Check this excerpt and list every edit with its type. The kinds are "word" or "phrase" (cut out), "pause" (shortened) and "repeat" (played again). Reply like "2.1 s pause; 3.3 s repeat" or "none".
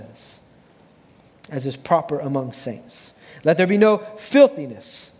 none